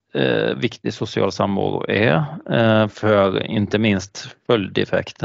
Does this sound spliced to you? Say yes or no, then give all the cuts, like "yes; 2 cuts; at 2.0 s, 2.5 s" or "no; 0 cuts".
no; 0 cuts